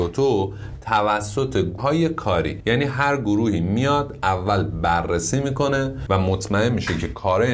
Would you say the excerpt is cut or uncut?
cut